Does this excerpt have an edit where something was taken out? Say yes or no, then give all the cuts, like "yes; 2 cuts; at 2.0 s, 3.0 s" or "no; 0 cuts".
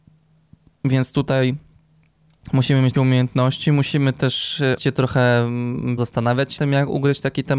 yes; 4 cuts; at 2.9 s, 4.8 s, 6.0 s, 6.6 s